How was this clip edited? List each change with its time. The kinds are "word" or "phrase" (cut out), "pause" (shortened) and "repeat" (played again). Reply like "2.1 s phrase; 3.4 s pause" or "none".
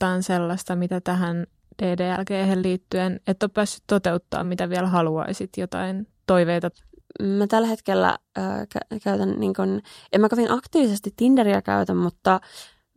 none